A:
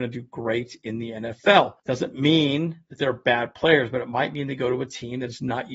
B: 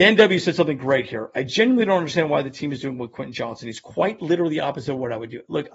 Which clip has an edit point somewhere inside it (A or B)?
A